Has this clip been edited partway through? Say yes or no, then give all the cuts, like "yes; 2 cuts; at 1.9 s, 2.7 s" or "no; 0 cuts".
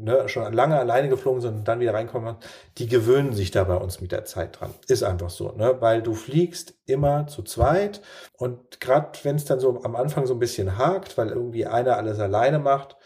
yes; 1 cut; at 8.3 s